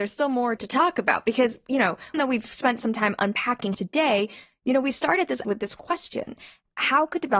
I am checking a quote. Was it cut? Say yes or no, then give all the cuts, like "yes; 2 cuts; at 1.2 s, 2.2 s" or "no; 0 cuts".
yes; 3 cuts; at 2.1 s, 3.7 s, 5.4 s